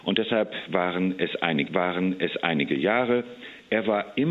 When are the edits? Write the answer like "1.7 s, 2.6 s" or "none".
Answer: 1.7 s